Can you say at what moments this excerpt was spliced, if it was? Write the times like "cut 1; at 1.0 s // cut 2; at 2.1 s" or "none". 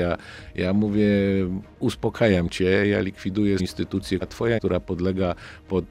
cut 1; at 3.6 s // cut 2; at 4.2 s // cut 3; at 4.6 s